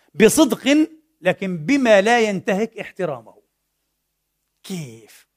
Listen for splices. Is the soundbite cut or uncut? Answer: uncut